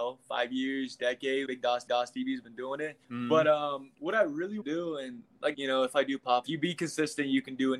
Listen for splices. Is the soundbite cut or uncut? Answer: cut